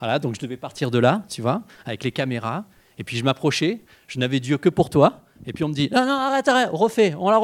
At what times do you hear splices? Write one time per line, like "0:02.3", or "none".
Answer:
none